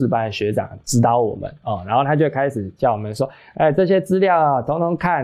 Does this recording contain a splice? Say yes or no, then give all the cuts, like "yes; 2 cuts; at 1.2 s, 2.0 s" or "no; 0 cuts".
no; 0 cuts